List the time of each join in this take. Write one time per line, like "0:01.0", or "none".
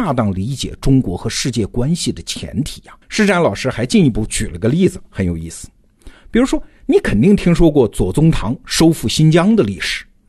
0:03.0